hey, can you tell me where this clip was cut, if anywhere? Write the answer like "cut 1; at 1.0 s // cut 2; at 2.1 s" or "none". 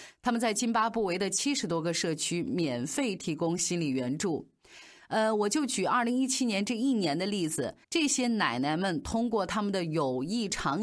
cut 1; at 7.8 s